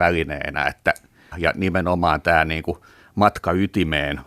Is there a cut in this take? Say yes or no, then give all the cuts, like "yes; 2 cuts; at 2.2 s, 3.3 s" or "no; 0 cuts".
yes; 1 cut; at 1.3 s